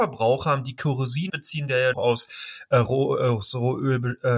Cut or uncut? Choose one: cut